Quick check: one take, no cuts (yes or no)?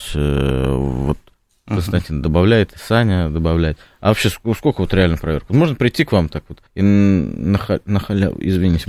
no